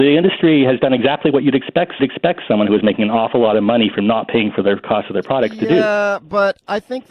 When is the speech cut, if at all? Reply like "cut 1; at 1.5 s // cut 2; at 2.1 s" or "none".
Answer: cut 1; at 2.0 s